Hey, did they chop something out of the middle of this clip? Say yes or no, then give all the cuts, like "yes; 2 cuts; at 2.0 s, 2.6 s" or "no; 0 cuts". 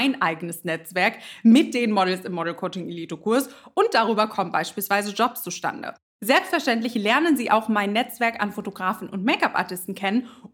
no; 0 cuts